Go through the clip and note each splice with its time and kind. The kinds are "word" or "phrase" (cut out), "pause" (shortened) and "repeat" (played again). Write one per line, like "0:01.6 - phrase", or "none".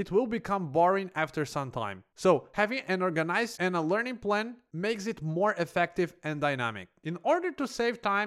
0:03.5 - word